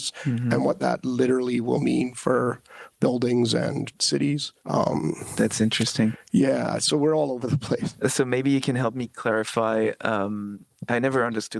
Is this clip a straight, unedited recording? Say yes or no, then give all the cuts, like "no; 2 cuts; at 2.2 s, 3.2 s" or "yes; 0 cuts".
no; 1 cut; at 4.6 s